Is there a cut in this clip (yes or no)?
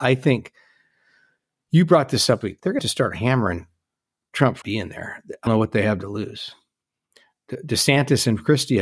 yes